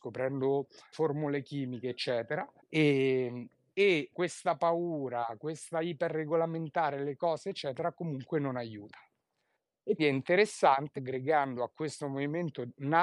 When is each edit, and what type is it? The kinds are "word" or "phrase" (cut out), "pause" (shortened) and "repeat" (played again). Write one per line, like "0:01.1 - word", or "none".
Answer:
0:00.9 - word
0:02.6 - pause
0:04.1 - word
0:10.0 - word
0:11.0 - phrase